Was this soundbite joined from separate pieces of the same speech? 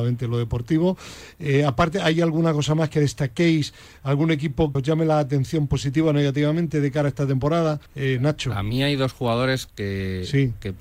yes; 2 cuts; at 4.7 s, 7.9 s

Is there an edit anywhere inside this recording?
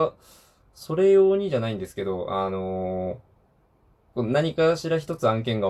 no; 0 cuts

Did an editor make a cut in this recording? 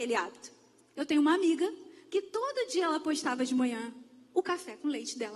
no; 0 cuts

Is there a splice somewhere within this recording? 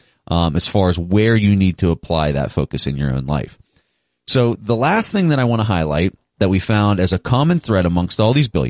no; 0 cuts

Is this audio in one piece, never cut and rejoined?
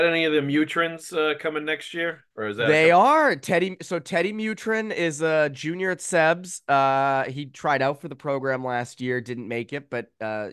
yes; 0 cuts

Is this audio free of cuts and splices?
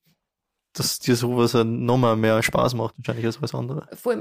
yes; 0 cuts

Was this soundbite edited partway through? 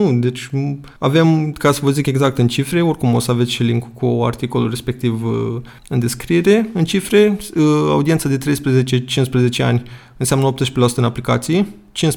yes; 2 cuts; at 1.0 s, 5.8 s

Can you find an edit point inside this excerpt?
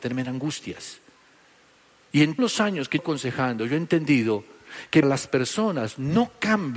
yes; 3 cuts; at 2.4 s, 3.0 s, 5.0 s

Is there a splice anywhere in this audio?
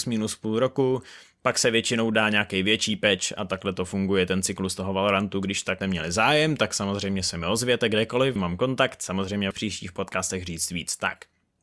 yes; 3 cuts; at 5.8 s, 8.4 s, 9.5 s

